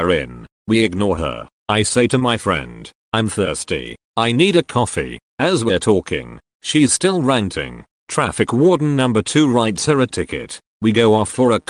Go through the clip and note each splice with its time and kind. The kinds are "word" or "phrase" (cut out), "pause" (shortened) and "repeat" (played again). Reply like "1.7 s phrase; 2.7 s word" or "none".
none